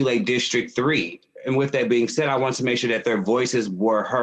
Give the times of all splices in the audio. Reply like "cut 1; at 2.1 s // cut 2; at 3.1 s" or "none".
none